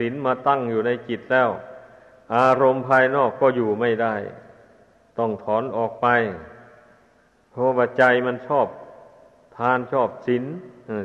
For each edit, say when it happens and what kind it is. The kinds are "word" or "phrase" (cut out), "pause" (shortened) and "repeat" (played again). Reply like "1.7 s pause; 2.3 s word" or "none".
none